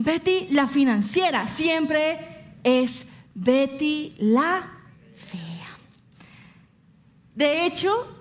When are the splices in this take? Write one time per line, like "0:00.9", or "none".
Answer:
none